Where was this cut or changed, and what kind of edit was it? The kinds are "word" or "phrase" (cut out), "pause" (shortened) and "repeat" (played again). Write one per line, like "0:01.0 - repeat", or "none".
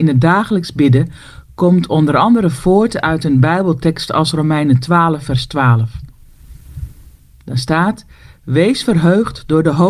none